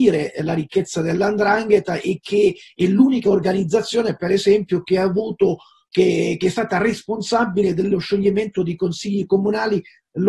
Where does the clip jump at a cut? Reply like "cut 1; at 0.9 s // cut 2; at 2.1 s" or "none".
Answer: none